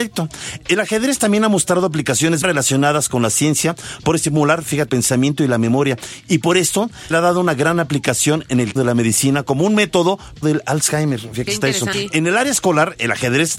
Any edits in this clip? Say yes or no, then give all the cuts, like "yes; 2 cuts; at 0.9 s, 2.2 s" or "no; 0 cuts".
yes; 7 cuts; at 2.4 s, 4.9 s, 7.1 s, 8.8 s, 10.4 s, 11.5 s, 11.9 s